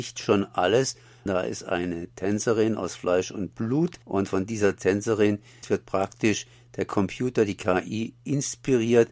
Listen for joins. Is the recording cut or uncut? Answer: cut